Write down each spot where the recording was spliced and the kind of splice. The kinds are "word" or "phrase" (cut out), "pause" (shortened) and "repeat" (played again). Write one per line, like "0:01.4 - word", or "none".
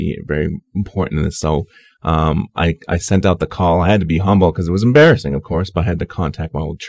none